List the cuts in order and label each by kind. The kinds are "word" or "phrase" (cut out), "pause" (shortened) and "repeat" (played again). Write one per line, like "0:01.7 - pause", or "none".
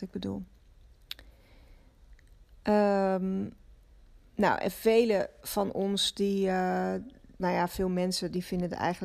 0:07.4 - word